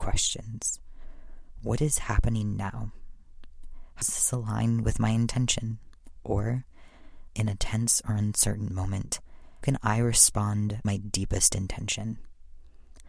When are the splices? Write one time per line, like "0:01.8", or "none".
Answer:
0:04.0
0:07.3
0:09.6
0:10.8